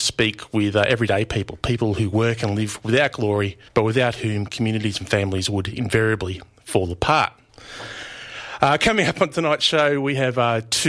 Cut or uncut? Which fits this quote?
cut